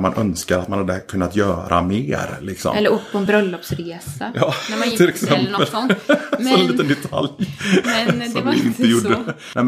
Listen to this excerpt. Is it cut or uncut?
uncut